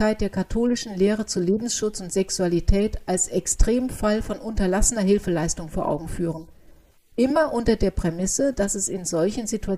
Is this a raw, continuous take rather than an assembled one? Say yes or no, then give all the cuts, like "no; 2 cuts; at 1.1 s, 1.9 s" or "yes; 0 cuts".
yes; 0 cuts